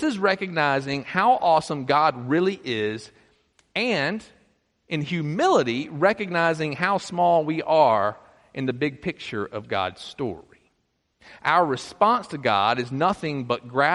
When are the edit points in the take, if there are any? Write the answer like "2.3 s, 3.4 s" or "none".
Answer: none

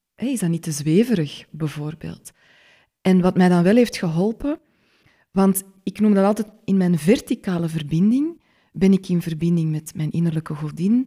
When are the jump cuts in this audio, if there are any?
none

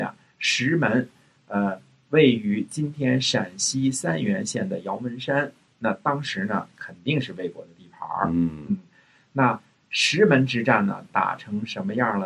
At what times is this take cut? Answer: none

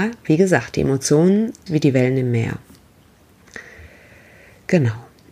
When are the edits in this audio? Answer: 1.7 s

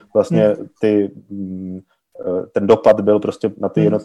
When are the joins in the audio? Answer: none

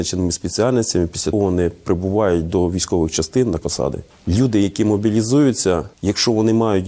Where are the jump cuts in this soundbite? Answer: 1.3 s, 3.6 s

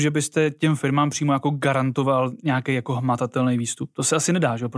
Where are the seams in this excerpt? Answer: none

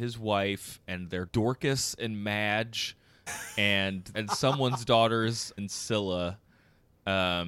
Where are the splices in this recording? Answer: 1.3 s, 3.3 s, 4.1 s, 5.6 s

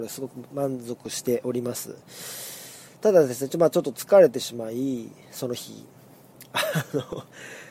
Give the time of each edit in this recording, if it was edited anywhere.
none

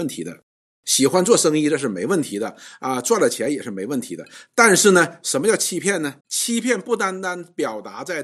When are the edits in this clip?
6.2 s

